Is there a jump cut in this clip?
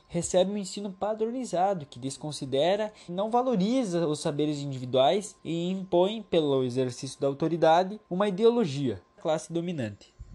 yes; 4 cuts; at 3.1 s, 5.4 s, 8.0 s, 9.2 s

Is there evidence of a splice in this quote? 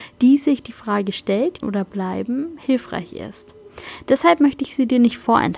yes; 1 cut; at 1.6 s

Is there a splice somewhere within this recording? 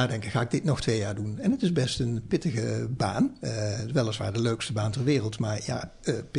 no; 0 cuts

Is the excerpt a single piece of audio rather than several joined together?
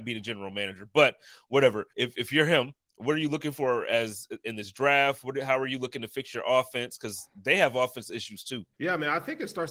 no; 2 cuts; at 1.9 s, 8.7 s

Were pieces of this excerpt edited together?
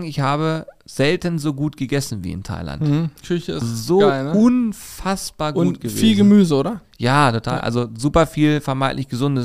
yes; 2 cuts; at 3.2 s, 3.6 s

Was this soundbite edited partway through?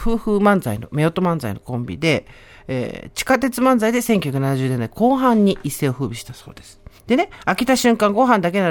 yes; 1 cut; at 7.0 s

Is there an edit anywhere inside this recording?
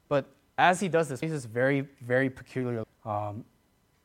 yes; 2 cuts; at 1.2 s, 2.8 s

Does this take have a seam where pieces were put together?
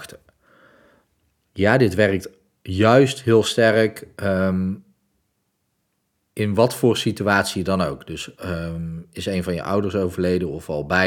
no; 0 cuts

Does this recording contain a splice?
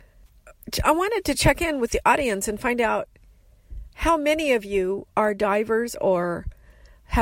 no; 0 cuts

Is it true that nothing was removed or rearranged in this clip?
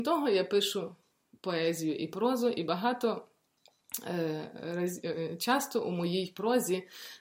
yes; 0 cuts

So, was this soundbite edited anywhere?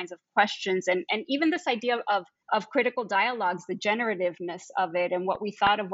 yes; 1 cut; at 2.4 s

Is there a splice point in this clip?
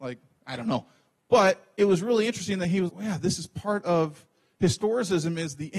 yes; 1 cut; at 2.9 s

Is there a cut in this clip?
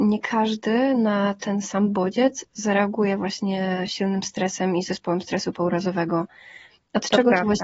no; 0 cuts

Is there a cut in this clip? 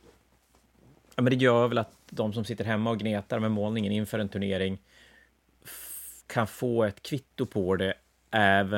yes; 1 cut; at 6.2 s

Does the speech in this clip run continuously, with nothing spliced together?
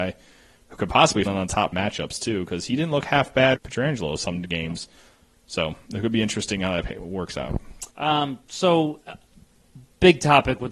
no; 4 cuts; at 1.2 s, 1.7 s, 3.5 s, 7.9 s

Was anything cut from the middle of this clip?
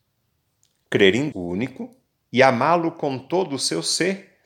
yes; 1 cut; at 1.3 s

